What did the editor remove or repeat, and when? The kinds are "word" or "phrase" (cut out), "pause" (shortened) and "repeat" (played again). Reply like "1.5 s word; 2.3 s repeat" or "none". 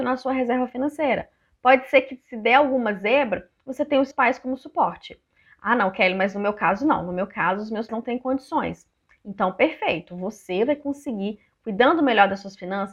4.1 s word; 7.9 s word